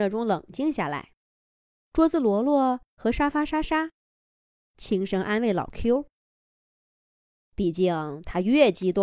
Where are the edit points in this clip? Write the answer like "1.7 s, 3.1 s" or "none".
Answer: 1.3 s